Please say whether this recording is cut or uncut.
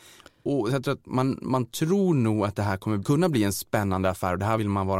uncut